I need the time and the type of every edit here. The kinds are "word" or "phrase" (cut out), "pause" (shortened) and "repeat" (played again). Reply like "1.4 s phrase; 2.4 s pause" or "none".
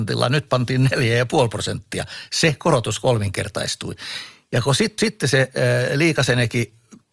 5.0 s repeat